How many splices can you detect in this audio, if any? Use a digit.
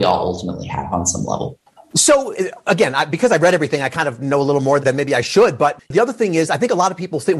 2